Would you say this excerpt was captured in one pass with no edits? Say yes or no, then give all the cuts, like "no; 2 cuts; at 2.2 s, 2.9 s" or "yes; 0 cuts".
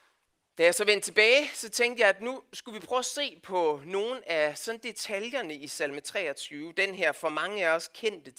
yes; 0 cuts